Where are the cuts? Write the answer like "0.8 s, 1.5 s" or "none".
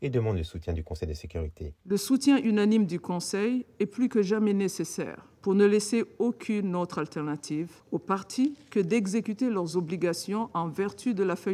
none